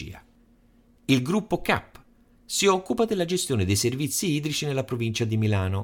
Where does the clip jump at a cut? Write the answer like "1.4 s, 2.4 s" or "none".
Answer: none